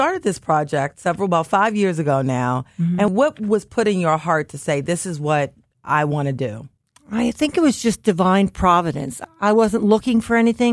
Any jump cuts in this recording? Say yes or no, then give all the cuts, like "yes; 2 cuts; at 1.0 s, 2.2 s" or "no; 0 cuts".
no; 0 cuts